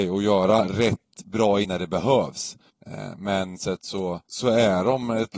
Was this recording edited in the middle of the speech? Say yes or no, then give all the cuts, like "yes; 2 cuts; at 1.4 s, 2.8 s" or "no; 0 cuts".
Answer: yes; 4 cuts; at 1.6 s, 2.7 s, 3.5 s, 4.2 s